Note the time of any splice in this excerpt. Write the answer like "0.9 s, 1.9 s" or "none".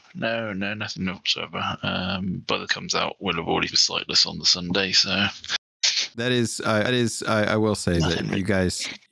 2.7 s, 3.7 s, 6.8 s

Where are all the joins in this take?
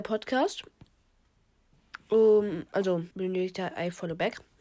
3.1 s

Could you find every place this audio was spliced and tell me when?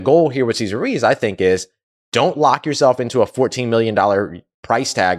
none

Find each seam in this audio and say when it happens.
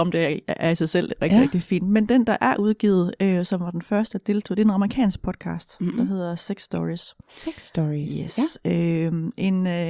7.2 s

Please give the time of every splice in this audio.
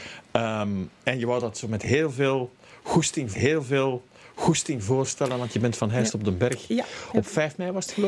3.3 s

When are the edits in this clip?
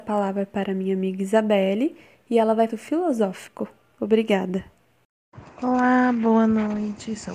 2.7 s

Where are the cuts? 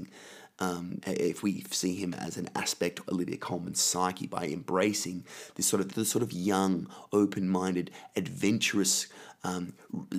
1.0 s, 3.0 s, 5.9 s

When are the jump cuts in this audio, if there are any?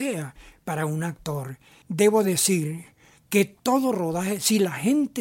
none

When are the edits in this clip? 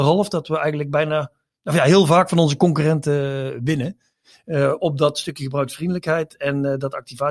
none

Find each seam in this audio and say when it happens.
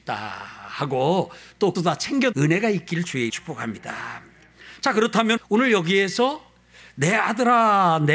1.7 s, 2.3 s, 3.3 s, 5.4 s

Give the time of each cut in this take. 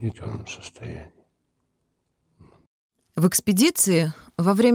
none

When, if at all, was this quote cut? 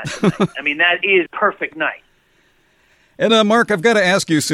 1.3 s, 3.3 s

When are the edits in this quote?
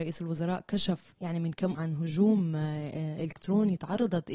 1.7 s

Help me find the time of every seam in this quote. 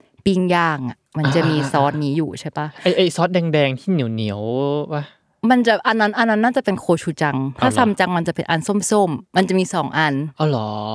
9.3 s

